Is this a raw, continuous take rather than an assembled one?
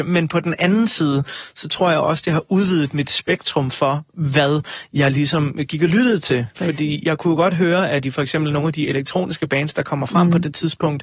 yes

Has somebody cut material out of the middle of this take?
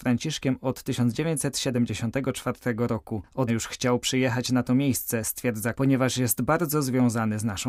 yes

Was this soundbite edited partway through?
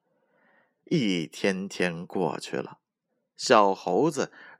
no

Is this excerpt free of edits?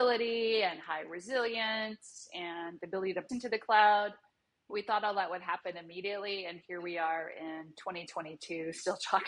no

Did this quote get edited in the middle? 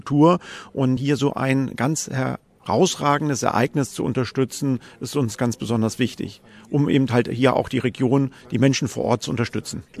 no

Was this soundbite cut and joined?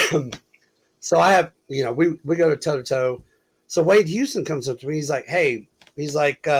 no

